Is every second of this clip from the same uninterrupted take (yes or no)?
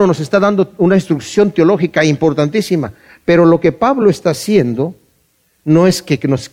yes